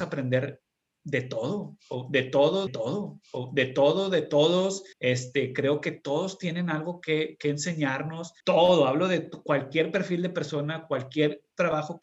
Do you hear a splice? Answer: yes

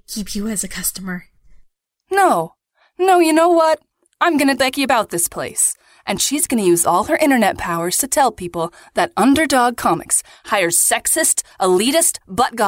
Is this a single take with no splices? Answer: no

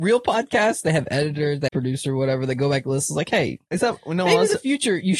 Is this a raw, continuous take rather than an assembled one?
no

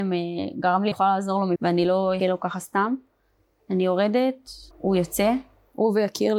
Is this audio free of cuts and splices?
no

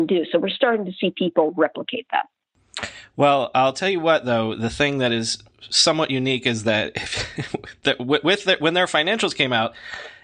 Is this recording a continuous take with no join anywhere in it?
yes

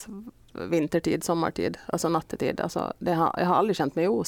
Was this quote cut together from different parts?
no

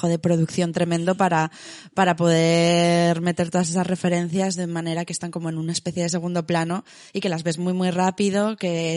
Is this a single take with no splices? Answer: yes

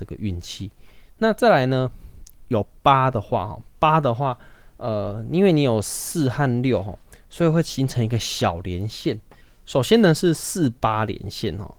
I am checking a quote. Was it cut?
no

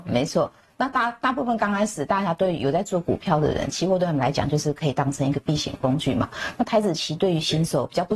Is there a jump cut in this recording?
no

